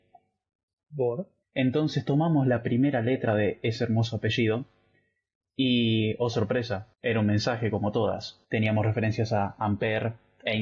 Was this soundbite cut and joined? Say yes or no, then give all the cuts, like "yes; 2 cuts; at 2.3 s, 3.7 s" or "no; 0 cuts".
yes; 3 cuts; at 1.4 s, 6.9 s, 8.4 s